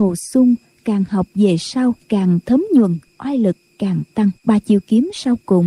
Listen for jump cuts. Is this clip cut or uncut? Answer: cut